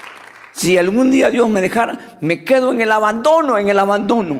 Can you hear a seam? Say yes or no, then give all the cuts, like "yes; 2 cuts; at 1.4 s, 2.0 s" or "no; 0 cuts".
no; 0 cuts